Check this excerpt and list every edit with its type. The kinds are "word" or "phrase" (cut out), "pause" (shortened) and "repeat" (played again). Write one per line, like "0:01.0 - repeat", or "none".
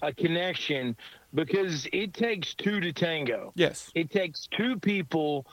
none